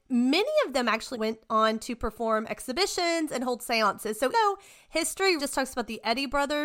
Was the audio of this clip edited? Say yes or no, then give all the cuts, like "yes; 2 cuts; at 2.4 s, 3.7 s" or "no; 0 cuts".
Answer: yes; 3 cuts; at 1.1 s, 4.3 s, 5.4 s